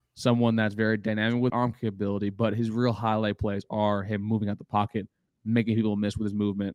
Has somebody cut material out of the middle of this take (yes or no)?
yes